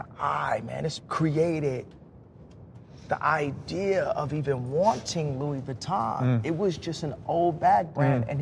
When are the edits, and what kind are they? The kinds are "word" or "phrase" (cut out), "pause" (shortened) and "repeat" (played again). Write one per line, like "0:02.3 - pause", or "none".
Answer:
0:01.0 - word